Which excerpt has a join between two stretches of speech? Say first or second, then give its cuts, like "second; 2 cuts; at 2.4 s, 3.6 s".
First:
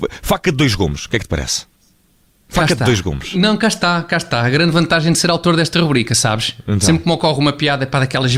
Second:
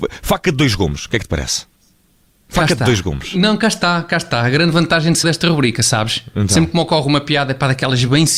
second; 1 cut; at 5.2 s